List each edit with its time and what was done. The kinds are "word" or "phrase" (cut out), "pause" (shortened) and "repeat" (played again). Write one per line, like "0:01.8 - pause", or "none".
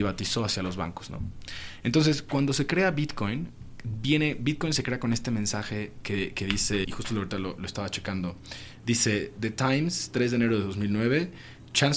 0:06.8 - word

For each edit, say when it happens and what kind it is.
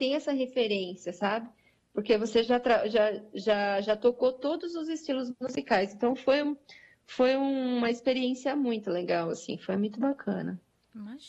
none

